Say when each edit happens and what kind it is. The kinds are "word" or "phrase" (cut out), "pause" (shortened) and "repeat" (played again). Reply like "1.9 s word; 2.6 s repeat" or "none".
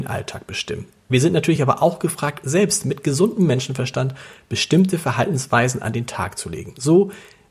none